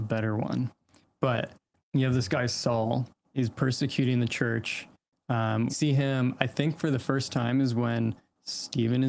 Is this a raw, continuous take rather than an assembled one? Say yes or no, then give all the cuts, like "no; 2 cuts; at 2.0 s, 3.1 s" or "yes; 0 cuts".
no; 3 cuts; at 1.8 s, 3.2 s, 5.7 s